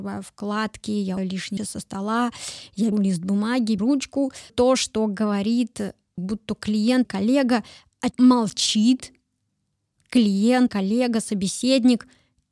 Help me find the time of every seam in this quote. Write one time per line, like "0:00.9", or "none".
0:01.2
0:01.6
0:02.9
0:03.8
0:04.5
0:06.2
0:07.0
0:08.1
0:10.7